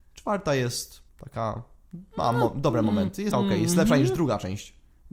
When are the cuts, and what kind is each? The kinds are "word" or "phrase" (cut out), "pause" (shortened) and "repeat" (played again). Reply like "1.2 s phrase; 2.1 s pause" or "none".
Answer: 1.1 s pause; 3.3 s word